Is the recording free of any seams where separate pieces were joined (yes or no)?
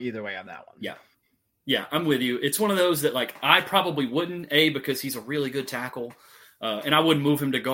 yes